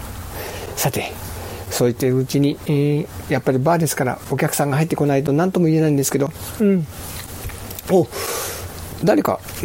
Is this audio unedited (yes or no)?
no